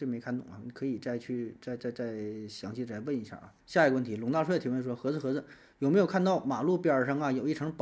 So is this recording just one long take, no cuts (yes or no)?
no